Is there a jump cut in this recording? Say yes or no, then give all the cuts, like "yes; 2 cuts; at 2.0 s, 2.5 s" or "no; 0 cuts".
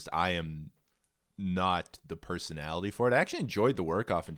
no; 0 cuts